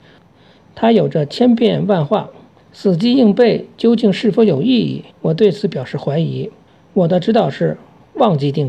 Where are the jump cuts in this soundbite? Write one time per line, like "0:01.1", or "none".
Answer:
0:02.6
0:05.1
0:06.7